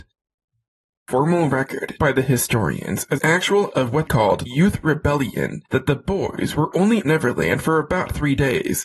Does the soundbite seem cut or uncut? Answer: cut